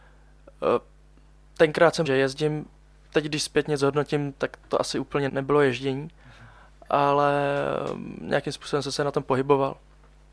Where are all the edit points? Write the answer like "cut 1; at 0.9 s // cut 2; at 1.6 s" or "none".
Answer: cut 1; at 2.1 s // cut 2; at 5.3 s